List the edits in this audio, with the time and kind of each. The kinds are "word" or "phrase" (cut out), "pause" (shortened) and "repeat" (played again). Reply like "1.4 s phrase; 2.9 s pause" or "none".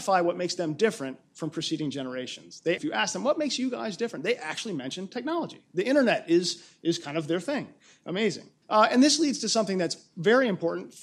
2.8 s word; 8.6 s pause